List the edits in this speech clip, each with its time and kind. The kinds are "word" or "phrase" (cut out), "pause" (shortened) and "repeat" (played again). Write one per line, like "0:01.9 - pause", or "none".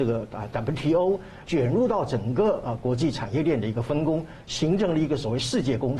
0:01.4 - word